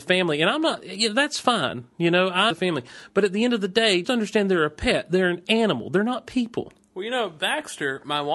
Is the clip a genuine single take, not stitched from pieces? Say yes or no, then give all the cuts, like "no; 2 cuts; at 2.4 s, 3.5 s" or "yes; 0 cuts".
no; 2 cuts; at 2.5 s, 4.0 s